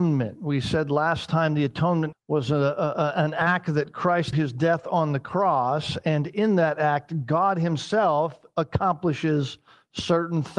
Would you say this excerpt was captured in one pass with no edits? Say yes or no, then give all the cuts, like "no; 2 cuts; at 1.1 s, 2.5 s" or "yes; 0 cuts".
no; 2 cuts; at 2.1 s, 4.3 s